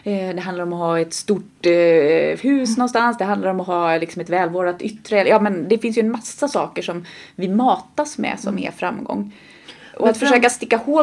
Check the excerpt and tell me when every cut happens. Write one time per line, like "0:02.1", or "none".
0:02.4

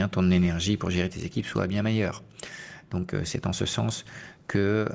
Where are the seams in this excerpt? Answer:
none

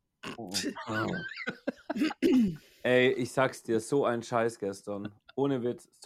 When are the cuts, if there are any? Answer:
none

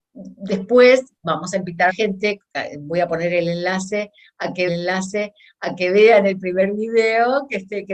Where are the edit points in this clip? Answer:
0:01.9
0:04.7

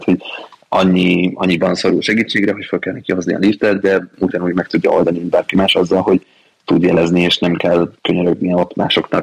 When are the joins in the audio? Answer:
none

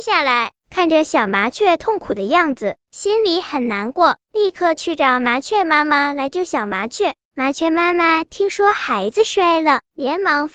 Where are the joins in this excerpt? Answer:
0:07.2

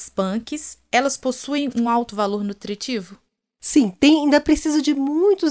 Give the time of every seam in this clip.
none

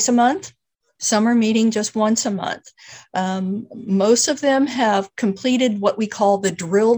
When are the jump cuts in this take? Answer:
none

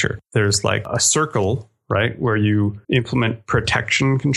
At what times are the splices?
0:02.8

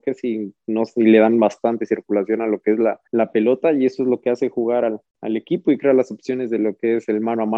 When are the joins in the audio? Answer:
0:03.1
0:05.1

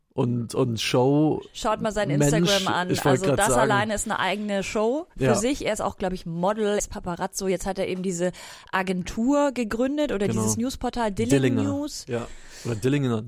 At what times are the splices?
0:06.8

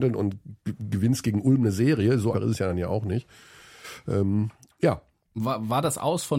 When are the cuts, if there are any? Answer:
0:02.3

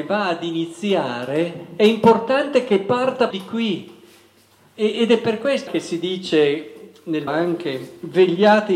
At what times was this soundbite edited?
0:03.3
0:05.7
0:07.3

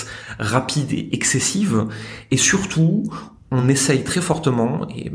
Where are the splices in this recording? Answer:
none

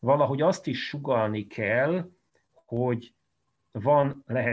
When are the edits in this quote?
none

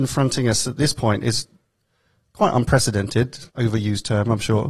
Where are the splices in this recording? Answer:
0:03.5

